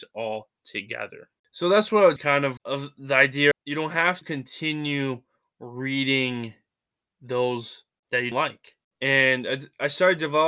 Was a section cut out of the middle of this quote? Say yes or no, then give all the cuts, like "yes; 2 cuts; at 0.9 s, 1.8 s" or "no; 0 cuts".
yes; 6 cuts; at 2.2 s, 2.6 s, 3.5 s, 4.2 s, 8.0 s, 8.3 s